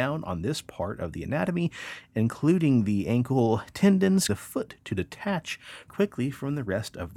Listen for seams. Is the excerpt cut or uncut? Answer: cut